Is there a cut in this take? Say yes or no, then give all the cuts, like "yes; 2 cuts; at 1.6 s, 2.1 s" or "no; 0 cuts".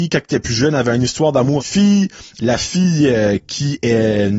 yes; 1 cut; at 1.6 s